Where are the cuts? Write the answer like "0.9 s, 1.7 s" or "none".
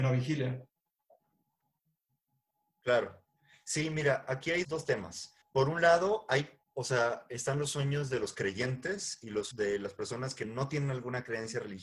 4.6 s, 5.4 s, 6.6 s, 9.5 s